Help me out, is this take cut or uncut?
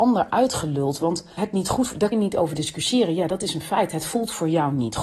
cut